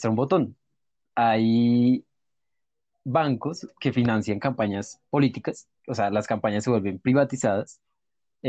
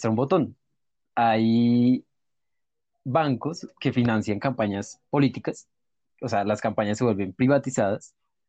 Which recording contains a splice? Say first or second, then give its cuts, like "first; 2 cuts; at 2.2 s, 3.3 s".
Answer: first; 1 cut; at 5.8 s